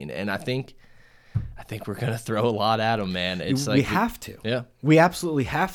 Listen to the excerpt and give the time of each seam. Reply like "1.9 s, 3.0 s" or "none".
none

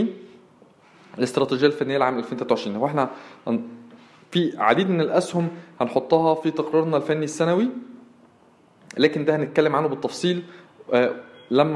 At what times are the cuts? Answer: none

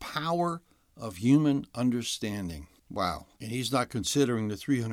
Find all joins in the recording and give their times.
none

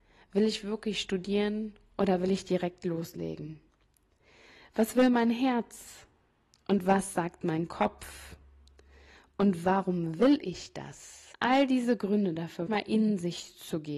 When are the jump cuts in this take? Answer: 11.3 s, 12.7 s

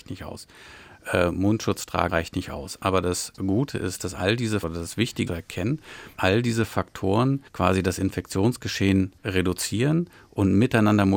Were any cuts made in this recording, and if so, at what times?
2.1 s, 4.6 s, 5.3 s, 6.2 s, 7.5 s, 9.2 s

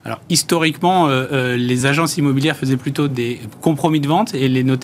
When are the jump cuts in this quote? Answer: none

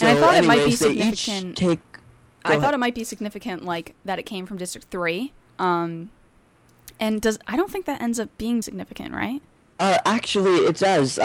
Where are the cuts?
2.4 s, 5.5 s, 8.6 s

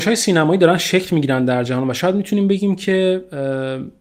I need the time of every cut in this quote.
none

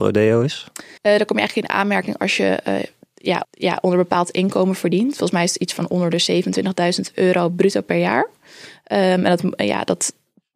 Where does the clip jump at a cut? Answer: 1.0 s, 3.4 s

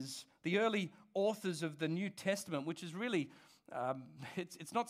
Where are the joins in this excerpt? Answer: none

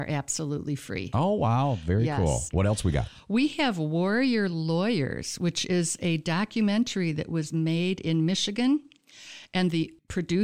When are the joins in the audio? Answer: none

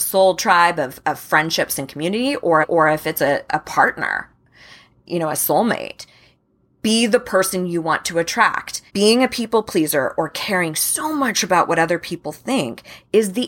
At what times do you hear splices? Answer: 2.6 s, 8.9 s

